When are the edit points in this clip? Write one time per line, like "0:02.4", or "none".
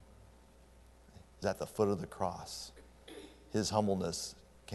0:01.4